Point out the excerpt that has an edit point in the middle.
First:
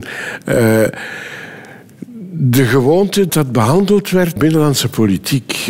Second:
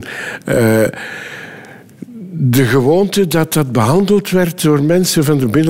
first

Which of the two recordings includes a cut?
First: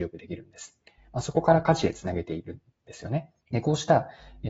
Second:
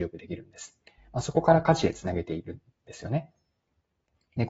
first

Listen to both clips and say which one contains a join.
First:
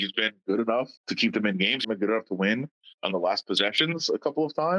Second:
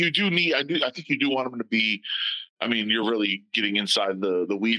first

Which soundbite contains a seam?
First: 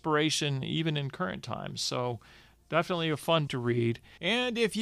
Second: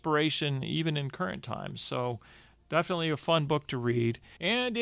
first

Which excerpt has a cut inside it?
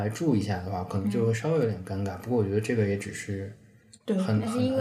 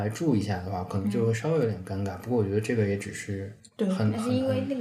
second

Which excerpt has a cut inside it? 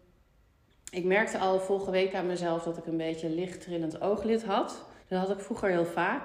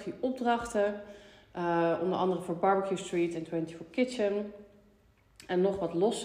first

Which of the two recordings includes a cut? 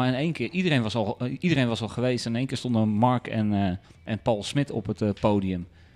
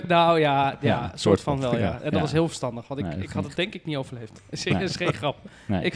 first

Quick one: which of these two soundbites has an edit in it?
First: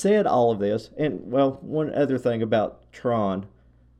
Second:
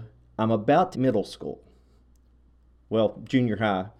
second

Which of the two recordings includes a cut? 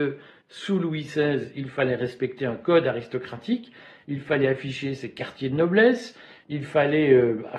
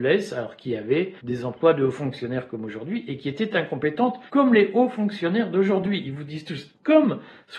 second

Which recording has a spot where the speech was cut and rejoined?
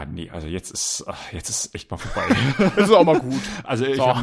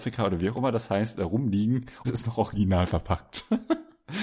second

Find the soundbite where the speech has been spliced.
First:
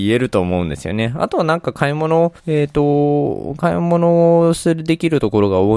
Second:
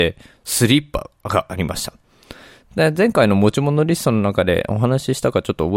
first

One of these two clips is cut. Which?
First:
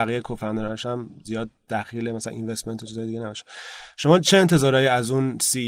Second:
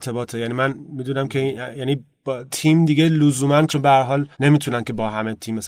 second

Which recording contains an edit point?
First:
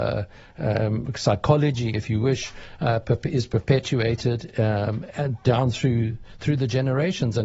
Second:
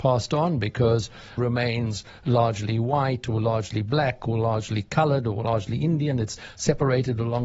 second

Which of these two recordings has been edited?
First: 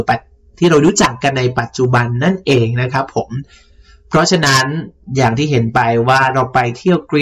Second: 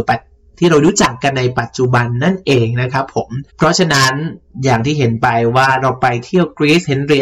second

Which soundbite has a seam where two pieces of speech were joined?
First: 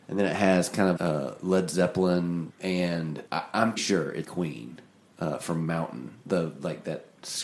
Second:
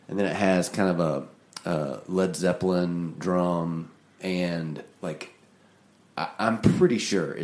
first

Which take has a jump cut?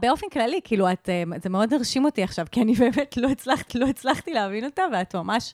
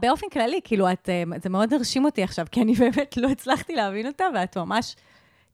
first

